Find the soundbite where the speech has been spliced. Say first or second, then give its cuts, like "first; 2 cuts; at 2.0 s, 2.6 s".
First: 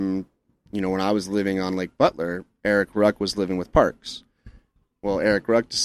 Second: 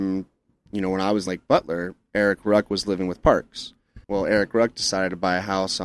second; 2 cuts; at 1.3 s, 4.0 s